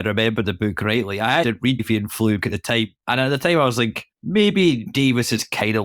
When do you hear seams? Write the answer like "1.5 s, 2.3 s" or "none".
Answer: 1.4 s, 1.8 s, 2.4 s, 3.0 s, 4.1 s